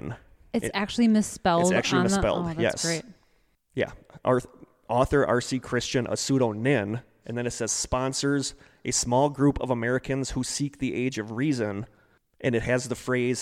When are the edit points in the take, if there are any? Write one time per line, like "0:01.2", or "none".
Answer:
none